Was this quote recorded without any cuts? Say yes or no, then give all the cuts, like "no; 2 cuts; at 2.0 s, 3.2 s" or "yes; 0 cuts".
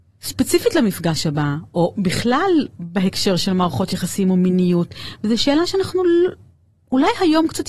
yes; 0 cuts